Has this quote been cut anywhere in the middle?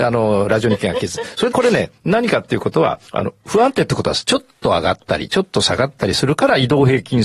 yes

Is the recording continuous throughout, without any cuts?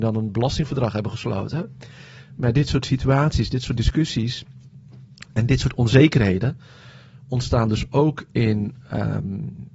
yes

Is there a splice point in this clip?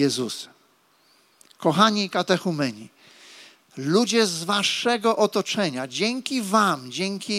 no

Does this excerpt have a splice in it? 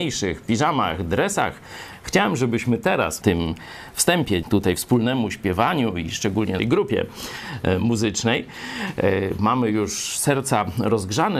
yes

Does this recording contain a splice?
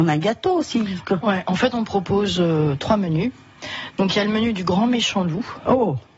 no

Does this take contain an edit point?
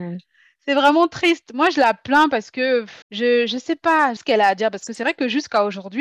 yes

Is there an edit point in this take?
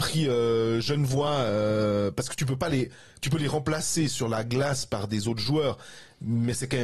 no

